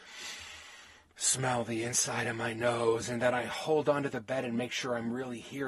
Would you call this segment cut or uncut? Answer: uncut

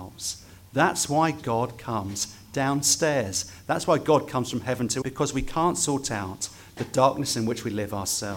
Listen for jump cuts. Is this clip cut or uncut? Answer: cut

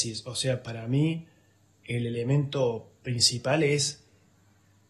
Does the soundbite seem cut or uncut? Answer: uncut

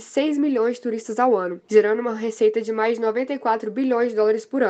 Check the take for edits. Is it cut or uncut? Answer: uncut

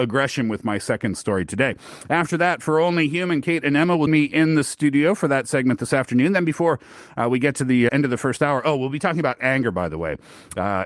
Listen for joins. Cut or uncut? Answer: cut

